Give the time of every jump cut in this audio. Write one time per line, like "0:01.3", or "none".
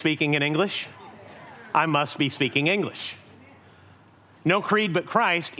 none